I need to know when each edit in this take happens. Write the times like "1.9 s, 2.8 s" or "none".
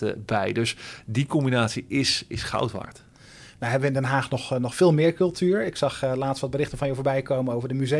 none